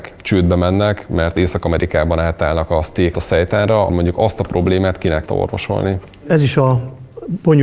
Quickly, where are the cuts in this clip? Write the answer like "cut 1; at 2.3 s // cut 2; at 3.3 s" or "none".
cut 1; at 3.1 s // cut 2; at 3.9 s // cut 3; at 5.3 s